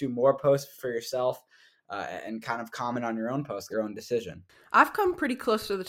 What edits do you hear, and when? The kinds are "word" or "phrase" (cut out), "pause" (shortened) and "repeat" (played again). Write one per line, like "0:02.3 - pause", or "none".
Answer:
0:03.7 - phrase